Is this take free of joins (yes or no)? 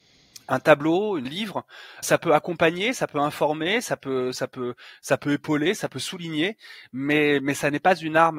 no